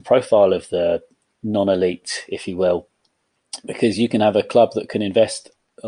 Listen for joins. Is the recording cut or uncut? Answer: uncut